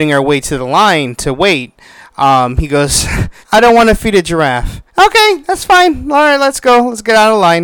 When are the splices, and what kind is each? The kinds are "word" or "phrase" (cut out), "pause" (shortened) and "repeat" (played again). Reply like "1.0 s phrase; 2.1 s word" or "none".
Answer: 3.4 s pause; 4.9 s pause

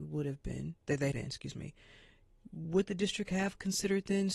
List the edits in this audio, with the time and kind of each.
1.1 s word

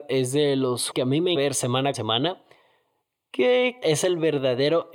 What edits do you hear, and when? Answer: 0.9 s word; 1.3 s word; 1.9 s word; 3.8 s word

